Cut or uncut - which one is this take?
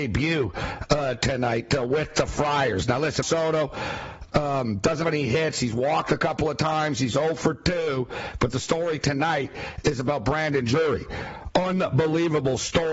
cut